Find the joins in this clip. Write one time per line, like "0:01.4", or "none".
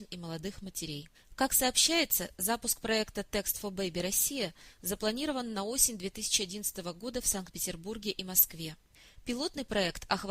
0:01.1